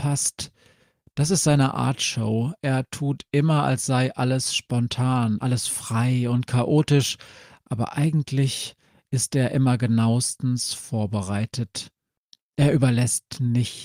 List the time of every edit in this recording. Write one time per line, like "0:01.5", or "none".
none